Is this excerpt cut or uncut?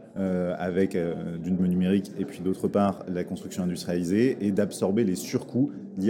cut